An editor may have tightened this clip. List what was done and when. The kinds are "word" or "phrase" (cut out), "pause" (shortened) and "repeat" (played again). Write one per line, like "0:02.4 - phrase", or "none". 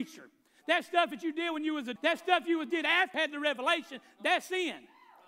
0:02.0 - word
0:03.1 - word